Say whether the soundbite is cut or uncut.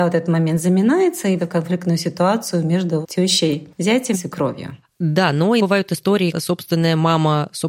cut